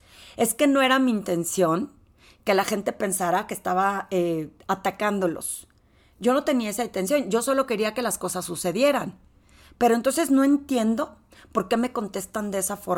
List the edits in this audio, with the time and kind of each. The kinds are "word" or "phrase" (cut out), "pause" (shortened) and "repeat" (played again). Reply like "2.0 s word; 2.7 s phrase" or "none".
none